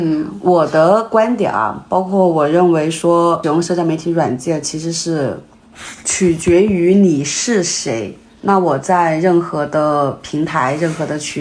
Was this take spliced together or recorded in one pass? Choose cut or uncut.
cut